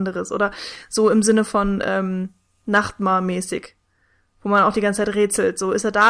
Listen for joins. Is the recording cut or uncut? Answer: uncut